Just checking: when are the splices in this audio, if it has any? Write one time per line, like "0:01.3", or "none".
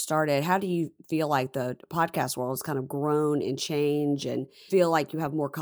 0:04.7